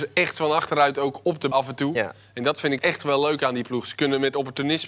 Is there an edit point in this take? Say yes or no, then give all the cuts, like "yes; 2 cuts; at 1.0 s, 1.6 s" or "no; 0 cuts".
yes; 2 cuts; at 1.5 s, 2.8 s